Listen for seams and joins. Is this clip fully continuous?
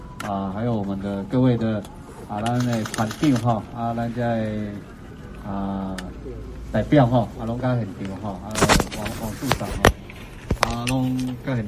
yes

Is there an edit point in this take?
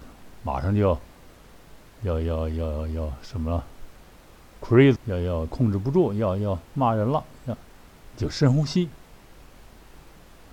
yes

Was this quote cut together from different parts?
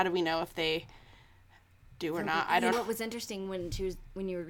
yes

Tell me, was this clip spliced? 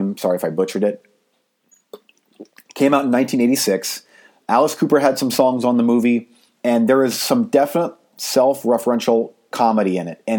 yes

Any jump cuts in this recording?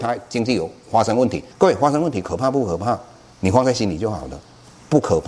yes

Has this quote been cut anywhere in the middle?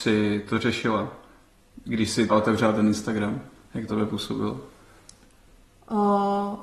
yes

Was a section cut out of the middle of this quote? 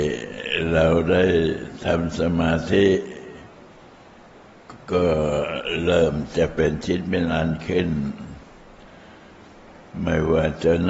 yes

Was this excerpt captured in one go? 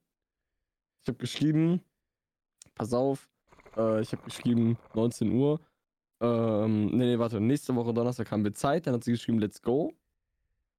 yes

